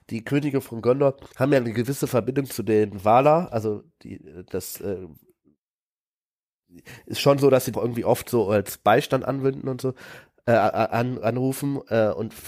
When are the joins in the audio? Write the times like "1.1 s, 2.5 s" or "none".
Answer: 1.3 s, 7.7 s